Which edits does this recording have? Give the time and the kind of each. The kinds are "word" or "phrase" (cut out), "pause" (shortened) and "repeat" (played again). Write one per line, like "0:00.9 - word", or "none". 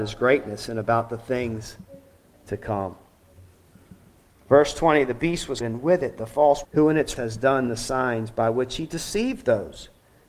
0:05.6 - word
0:06.6 - word
0:07.2 - word